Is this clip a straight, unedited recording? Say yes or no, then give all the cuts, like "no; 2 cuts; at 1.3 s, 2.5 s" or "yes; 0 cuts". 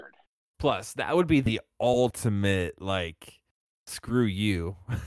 yes; 0 cuts